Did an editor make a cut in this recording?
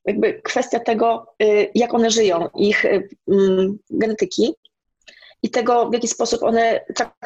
no; 0 cuts

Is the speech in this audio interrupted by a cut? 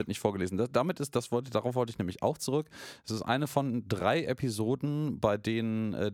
no; 0 cuts

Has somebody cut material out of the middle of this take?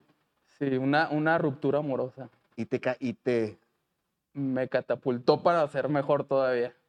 no; 0 cuts

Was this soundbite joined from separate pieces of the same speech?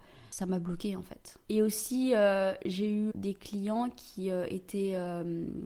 yes; 2 cuts; at 1.4 s, 3.1 s

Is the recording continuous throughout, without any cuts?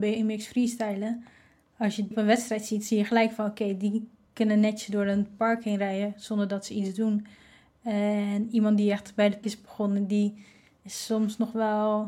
no; 2 cuts; at 2.1 s, 9.4 s

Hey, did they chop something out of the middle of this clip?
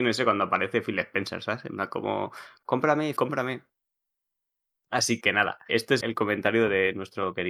yes; 4 cuts; at 3.2 s, 5.2 s, 5.7 s, 6.0 s

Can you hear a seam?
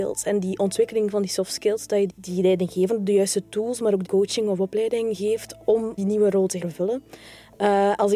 yes; 4 cuts; at 2.1 s, 4.0 s, 6.0 s, 6.6 s

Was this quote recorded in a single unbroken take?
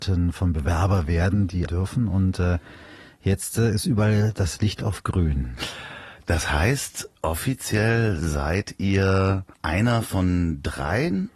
no; 3 cuts; at 1.7 s, 7.2 s, 9.5 s

